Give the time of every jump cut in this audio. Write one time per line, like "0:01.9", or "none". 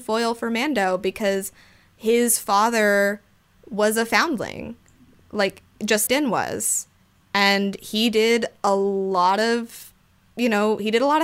0:06.1